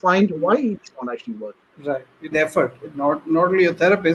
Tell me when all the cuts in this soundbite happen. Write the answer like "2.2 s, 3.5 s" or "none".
1.7 s, 2.3 s